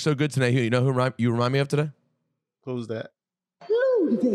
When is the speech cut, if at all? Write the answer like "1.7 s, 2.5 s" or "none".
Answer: none